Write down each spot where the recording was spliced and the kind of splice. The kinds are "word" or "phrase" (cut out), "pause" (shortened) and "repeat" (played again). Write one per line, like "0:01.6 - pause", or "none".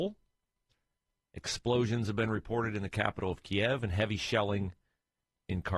none